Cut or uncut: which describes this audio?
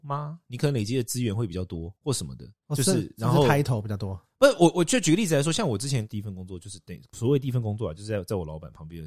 cut